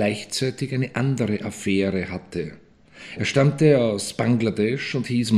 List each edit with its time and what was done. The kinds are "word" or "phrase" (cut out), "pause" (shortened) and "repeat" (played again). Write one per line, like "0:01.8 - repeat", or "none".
none